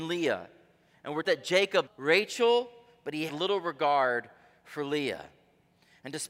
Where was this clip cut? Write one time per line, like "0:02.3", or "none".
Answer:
0:01.2
0:01.9
0:03.3